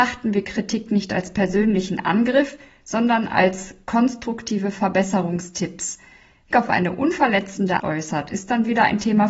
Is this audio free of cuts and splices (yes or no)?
no